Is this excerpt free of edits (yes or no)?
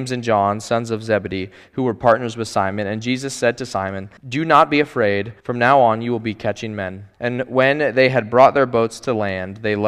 no